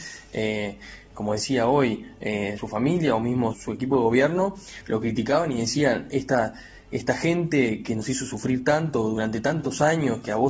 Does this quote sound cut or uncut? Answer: cut